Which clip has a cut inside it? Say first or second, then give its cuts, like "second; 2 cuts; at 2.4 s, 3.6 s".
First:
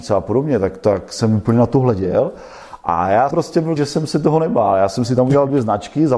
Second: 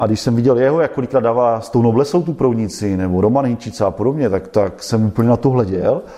first; 2 cuts; at 3.3 s, 3.8 s